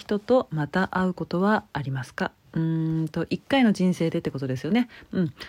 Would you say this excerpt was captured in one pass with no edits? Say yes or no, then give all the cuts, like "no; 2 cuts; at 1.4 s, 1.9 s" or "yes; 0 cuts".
no; 1 cut; at 2.4 s